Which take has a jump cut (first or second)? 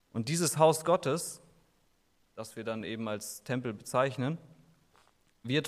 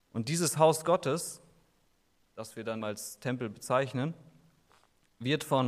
second